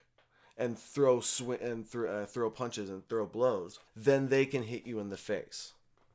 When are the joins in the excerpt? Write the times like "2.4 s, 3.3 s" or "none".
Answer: 3.9 s